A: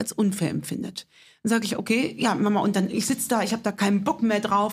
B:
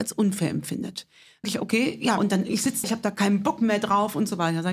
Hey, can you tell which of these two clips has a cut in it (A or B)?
B